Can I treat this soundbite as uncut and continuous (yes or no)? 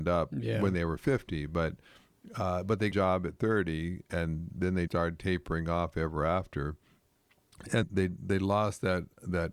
no